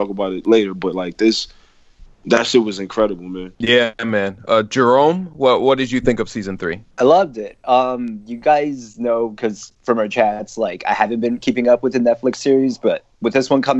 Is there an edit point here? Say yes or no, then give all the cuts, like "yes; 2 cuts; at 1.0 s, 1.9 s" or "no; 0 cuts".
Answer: yes; 2 cuts; at 3.5 s, 6.9 s